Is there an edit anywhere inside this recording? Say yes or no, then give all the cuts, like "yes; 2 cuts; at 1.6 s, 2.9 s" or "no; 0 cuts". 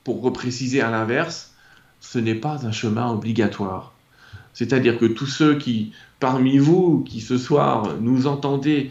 no; 0 cuts